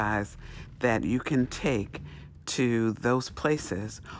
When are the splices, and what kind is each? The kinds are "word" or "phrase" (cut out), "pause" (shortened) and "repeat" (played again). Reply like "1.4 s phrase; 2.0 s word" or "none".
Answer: none